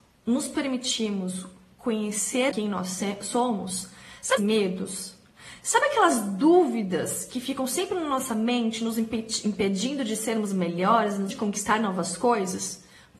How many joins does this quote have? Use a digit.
3